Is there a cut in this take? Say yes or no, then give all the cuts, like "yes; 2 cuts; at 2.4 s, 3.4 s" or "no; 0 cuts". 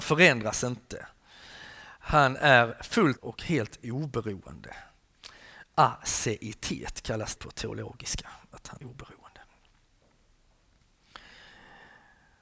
yes; 3 cuts; at 3.2 s, 7.4 s, 8.8 s